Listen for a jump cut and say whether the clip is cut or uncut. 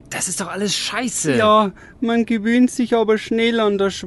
uncut